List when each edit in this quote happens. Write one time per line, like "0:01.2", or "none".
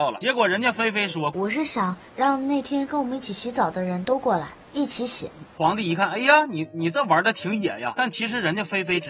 0:02.1
0:04.6